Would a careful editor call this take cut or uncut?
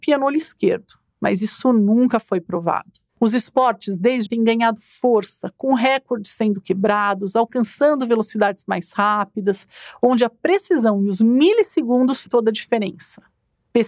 cut